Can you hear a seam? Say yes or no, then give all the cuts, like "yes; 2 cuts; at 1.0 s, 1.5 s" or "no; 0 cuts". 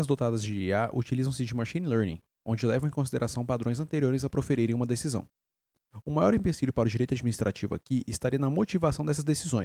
no; 0 cuts